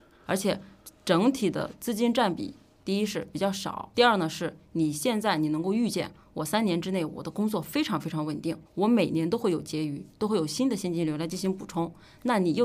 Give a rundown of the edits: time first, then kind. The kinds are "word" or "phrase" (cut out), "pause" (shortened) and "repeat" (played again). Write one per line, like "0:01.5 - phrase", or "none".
0:03.9 - word
0:08.7 - pause